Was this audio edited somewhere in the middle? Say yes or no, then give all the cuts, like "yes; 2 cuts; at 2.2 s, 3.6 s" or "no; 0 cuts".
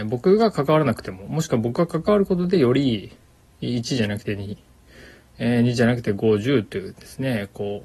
no; 0 cuts